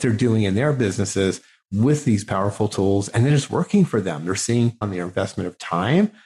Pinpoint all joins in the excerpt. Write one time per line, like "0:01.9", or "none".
0:04.8